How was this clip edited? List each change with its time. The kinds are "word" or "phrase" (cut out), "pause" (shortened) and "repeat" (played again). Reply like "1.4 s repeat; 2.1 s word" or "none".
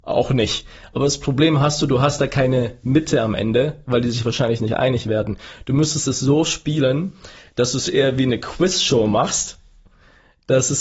none